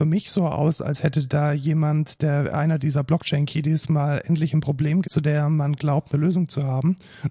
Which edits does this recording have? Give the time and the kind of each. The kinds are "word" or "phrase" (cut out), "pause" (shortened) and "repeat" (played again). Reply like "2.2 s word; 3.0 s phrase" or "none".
5.0 s word